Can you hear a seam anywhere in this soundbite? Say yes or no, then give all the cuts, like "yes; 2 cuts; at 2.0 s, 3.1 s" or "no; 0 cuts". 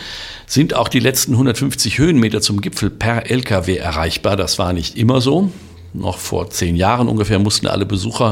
no; 0 cuts